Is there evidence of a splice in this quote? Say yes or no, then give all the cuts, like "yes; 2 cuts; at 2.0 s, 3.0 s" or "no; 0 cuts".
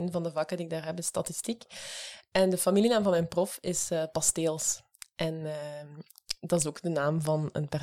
no; 0 cuts